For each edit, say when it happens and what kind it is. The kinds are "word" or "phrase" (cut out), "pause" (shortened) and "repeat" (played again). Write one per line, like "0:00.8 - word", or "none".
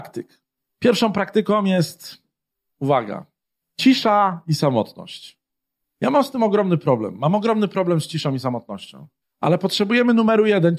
none